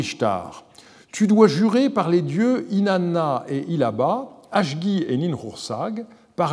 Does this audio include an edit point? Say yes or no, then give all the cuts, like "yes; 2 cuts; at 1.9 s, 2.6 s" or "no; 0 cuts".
no; 0 cuts